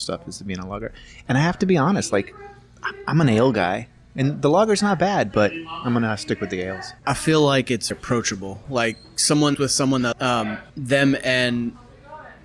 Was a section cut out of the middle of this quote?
yes; 5 cuts; at 7.0 s, 7.9 s, 9.5 s, 10.1 s, 10.7 s

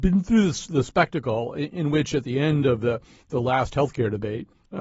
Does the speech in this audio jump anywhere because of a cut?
no; 0 cuts

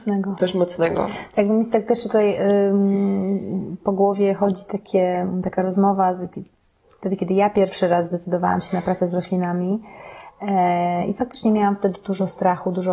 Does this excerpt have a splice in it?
no; 0 cuts

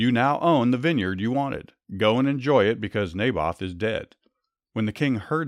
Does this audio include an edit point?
no; 0 cuts

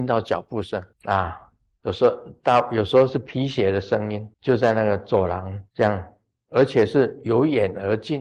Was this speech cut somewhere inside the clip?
yes; 3 cuts; at 0.9 s, 4.3 s, 5.7 s

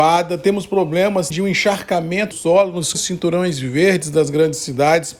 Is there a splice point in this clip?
yes; 3 cuts; at 1.3 s, 2.3 s, 2.9 s

